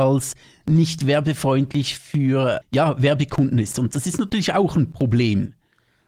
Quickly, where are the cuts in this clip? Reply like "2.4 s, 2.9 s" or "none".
2.6 s